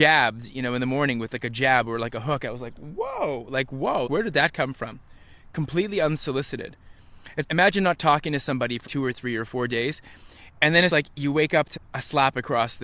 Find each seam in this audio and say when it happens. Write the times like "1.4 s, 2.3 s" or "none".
4.1 s, 7.4 s, 8.9 s, 10.9 s, 11.8 s